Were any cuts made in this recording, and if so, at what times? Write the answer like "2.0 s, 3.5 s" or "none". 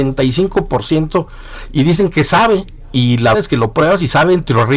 3.3 s